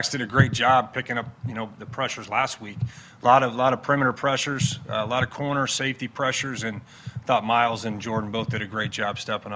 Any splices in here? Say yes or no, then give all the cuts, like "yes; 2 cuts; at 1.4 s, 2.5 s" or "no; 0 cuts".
no; 0 cuts